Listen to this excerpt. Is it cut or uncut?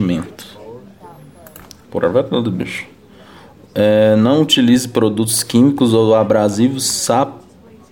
uncut